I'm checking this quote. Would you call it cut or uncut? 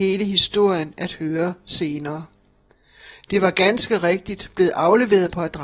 uncut